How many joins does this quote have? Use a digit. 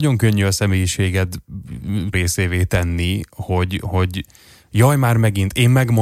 1